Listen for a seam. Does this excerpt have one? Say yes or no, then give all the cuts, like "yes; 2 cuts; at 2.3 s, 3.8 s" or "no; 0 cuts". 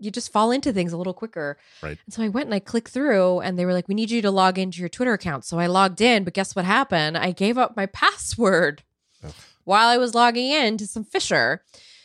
no; 0 cuts